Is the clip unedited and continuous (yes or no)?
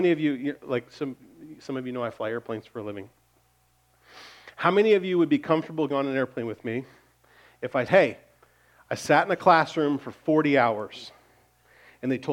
no